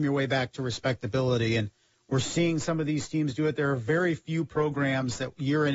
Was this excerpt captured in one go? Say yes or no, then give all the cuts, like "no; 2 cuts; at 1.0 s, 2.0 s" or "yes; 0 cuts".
yes; 0 cuts